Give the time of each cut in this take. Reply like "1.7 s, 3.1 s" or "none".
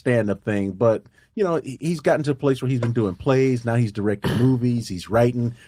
none